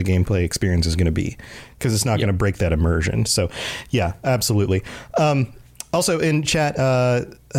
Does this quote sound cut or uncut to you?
uncut